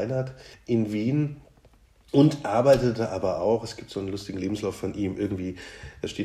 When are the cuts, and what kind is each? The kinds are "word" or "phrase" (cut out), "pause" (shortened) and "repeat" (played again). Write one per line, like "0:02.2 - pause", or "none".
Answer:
none